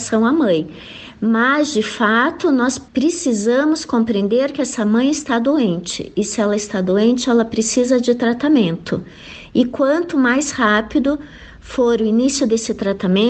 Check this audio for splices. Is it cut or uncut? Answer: cut